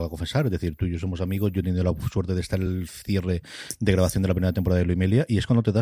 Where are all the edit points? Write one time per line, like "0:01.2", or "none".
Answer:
none